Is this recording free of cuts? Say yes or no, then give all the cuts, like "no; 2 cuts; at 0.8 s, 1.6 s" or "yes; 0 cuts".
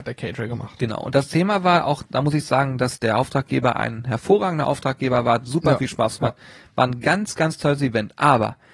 yes; 0 cuts